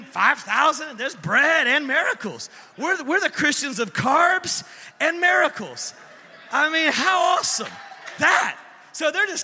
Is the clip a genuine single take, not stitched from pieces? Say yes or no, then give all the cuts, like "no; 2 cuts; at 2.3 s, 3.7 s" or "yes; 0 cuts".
no; 1 cut; at 8.2 s